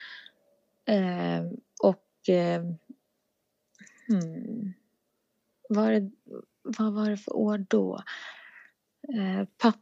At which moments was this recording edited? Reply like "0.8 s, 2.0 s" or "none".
none

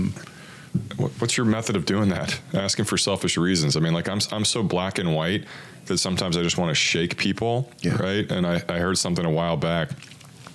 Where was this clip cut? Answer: none

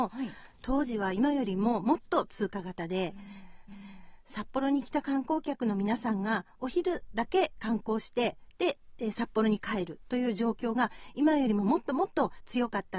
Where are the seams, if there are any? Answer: 3.7 s

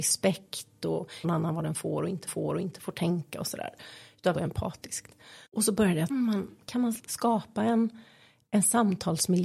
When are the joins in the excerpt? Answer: 1.2 s, 2.3 s, 4.3 s, 5.5 s, 6.1 s, 7.0 s

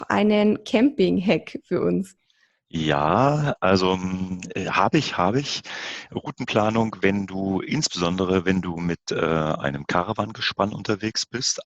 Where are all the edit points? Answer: none

